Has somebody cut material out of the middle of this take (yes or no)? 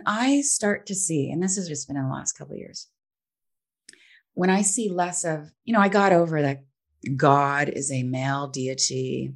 yes